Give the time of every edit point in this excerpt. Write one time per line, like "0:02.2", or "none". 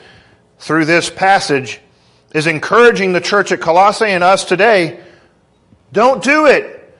none